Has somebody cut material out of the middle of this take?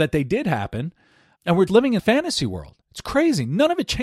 yes; 4 cuts; at 1.4 s, 1.7 s, 2.0 s, 2.8 s

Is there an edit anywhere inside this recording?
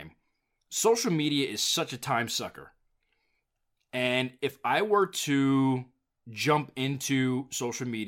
no; 0 cuts

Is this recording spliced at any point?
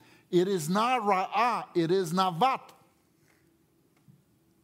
no; 0 cuts

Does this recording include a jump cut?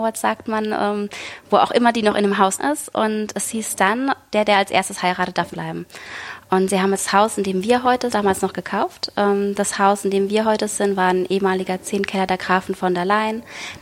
yes; 3 cuts; at 2.6 s, 5.5 s, 8.1 s

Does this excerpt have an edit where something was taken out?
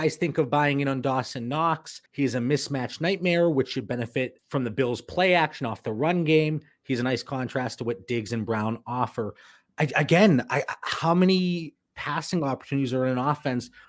yes; 1 cut; at 2.1 s

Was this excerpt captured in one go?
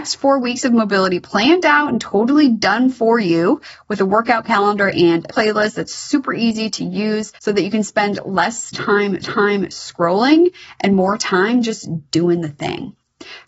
no; 3 cuts; at 5.3 s, 7.4 s, 9.2 s

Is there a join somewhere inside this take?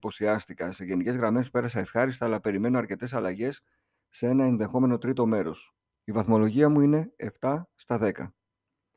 no; 0 cuts

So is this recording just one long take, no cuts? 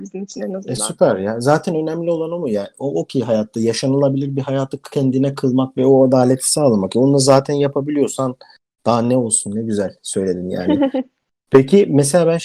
yes; 0 cuts

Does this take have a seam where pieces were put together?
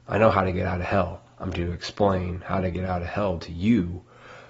yes; 1 cut; at 1.5 s

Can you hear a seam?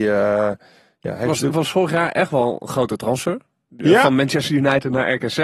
no; 0 cuts

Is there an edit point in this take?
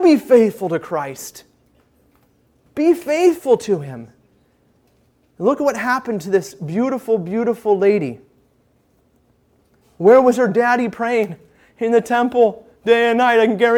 no; 0 cuts

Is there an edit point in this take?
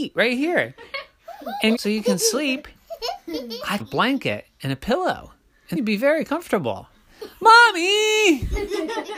yes; 3 cuts; at 1.7 s, 3.8 s, 5.7 s

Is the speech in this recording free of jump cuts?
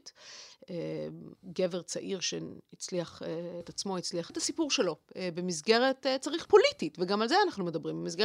no; 4 cuts; at 1.3 s, 3.6 s, 4.3 s, 6.4 s

